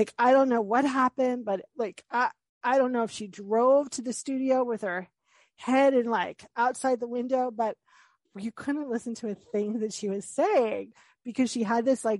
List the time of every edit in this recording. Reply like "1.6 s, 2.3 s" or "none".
1.7 s